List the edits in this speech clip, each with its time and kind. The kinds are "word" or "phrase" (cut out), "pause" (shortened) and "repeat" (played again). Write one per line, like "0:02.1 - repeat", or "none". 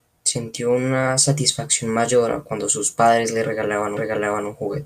0:04.0 - repeat